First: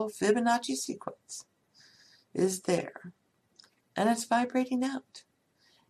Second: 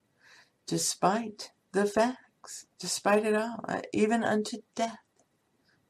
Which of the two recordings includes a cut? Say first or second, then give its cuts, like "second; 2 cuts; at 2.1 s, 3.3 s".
second; 1 cut; at 2.7 s